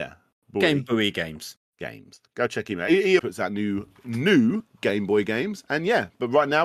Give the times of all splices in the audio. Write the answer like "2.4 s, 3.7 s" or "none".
3.2 s